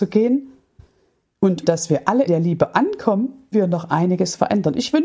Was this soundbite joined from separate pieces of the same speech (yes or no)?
yes